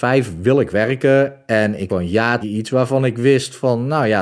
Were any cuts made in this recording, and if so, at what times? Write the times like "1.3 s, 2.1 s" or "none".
1.9 s, 2.4 s